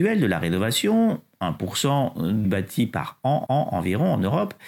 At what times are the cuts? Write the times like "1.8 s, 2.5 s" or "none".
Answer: 2.4 s, 3.4 s